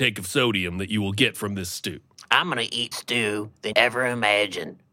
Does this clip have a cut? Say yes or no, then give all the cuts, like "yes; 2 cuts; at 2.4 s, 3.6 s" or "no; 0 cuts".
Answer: yes; 2 cuts; at 2.9 s, 3.7 s